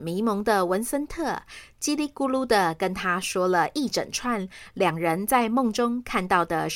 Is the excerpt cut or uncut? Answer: uncut